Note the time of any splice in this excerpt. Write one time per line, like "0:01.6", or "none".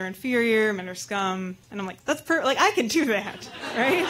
0:01.6
0:02.0